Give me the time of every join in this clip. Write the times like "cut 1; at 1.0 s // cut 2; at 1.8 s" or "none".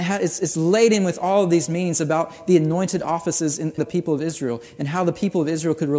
cut 1; at 3.8 s